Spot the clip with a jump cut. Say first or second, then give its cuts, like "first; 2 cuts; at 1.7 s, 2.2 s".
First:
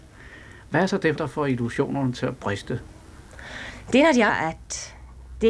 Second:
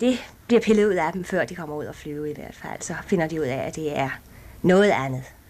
first; 2 cuts; at 1.2 s, 4.3 s